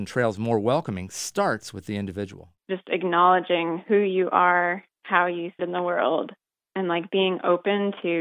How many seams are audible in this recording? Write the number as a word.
three